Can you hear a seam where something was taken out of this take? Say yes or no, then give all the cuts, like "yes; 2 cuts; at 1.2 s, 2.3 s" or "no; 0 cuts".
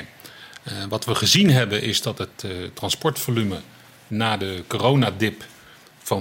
no; 0 cuts